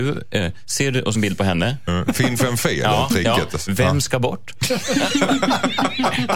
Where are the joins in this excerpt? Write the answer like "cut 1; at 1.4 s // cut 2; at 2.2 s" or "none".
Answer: cut 1; at 1.1 s